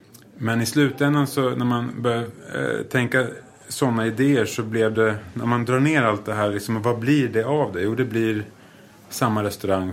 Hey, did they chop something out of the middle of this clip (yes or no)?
no